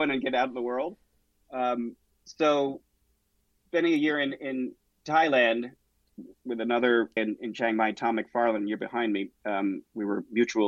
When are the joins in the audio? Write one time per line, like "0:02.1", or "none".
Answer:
0:07.2